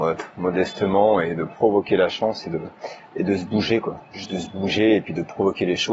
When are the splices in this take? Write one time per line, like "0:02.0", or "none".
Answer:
0:03.0